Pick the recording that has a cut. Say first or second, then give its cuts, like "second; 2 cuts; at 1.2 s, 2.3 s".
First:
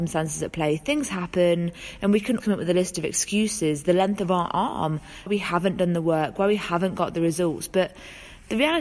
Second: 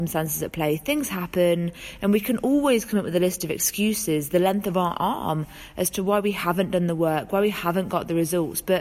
first; 2 cuts; at 2.4 s, 5.3 s